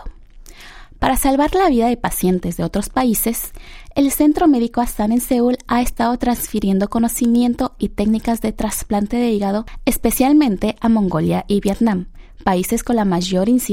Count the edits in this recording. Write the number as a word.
zero